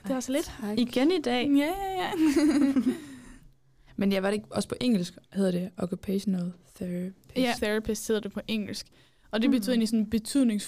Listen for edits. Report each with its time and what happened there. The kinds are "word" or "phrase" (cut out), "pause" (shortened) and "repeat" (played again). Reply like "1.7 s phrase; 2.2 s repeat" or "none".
5.3 s pause; 7.6 s word